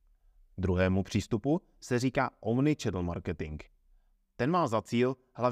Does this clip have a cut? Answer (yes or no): no